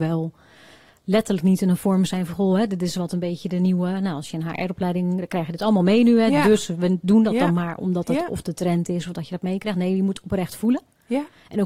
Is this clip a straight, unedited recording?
yes; 0 cuts

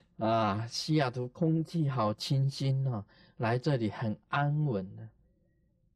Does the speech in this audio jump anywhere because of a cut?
no; 0 cuts

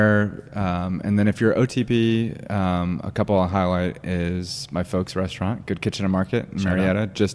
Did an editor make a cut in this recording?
yes; 1 cut; at 2.5 s

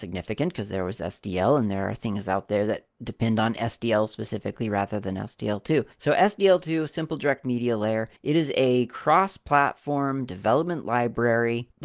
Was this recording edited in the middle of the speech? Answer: yes; 2 cuts; at 2.9 s, 8.2 s

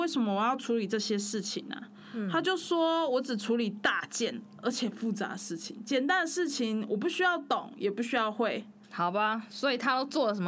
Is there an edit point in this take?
yes; 1 cut; at 8.8 s

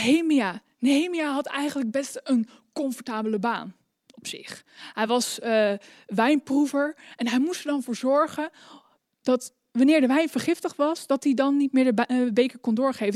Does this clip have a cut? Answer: no; 0 cuts

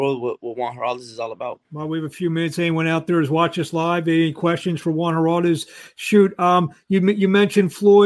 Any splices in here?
yes; 1 cut; at 1.6 s

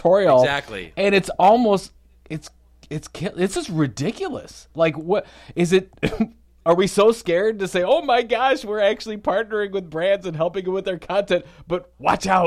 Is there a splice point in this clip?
no; 0 cuts

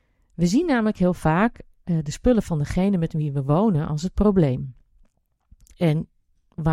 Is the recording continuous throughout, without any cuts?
yes; 0 cuts

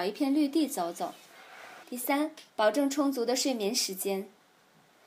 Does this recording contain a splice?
yes; 2 cuts; at 1.8 s, 2.5 s

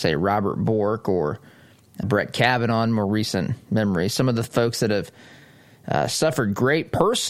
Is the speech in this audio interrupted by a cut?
yes; 1 cut; at 2.0 s

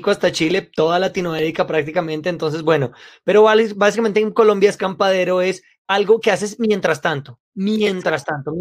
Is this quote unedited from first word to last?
yes; 0 cuts

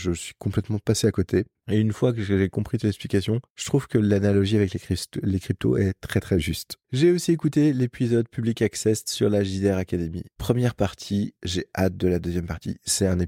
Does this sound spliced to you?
no; 0 cuts

